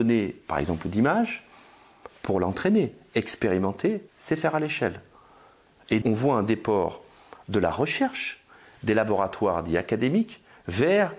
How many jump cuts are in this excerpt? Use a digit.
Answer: 2